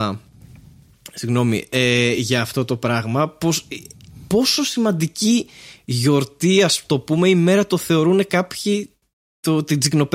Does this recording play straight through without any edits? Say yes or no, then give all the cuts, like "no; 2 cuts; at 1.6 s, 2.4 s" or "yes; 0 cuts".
yes; 0 cuts